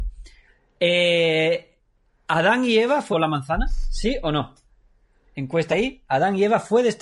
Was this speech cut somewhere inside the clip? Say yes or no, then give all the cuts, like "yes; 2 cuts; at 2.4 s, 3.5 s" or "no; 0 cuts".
yes; 2 cuts; at 3.1 s, 5.7 s